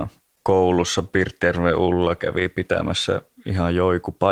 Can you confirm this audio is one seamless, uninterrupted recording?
yes; 0 cuts

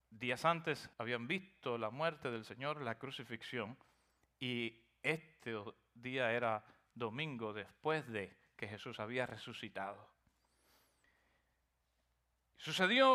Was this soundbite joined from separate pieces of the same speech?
yes; 1 cut; at 0.9 s

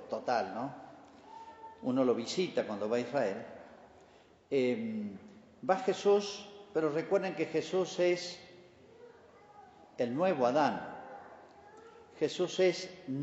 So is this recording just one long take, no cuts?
yes; 0 cuts

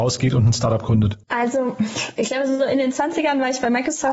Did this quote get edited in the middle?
yes; 1 cut; at 1.2 s

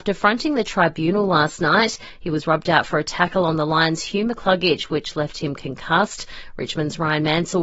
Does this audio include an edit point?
no; 0 cuts

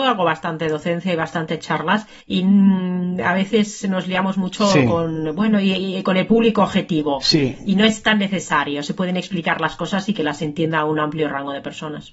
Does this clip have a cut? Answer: yes; 1 cut; at 2.2 s

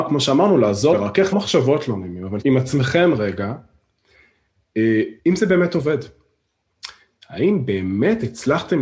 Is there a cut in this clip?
yes; 4 cuts; at 0.9 s, 1.3 s, 2.4 s, 5.2 s

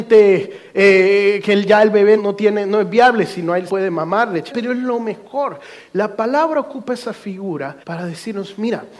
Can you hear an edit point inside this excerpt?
yes; 4 cuts; at 2.2 s, 3.7 s, 4.5 s, 7.8 s

